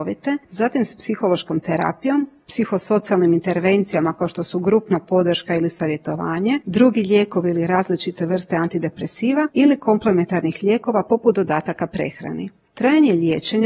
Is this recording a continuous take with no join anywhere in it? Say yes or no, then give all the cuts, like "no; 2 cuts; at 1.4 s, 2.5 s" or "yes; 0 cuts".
yes; 0 cuts